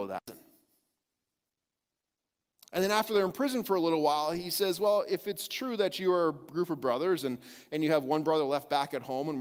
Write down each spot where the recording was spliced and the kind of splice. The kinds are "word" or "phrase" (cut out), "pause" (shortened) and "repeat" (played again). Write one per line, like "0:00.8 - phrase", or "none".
none